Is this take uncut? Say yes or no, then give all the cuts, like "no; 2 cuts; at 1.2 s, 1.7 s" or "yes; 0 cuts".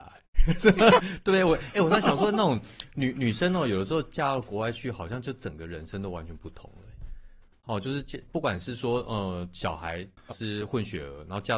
no; 1 cut; at 10.3 s